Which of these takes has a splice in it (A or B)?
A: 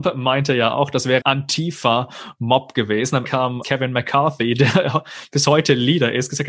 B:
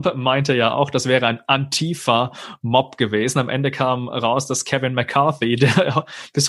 A